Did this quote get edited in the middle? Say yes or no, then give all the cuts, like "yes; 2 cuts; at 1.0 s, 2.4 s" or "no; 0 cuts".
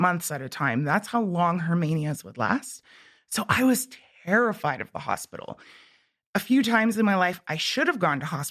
no; 0 cuts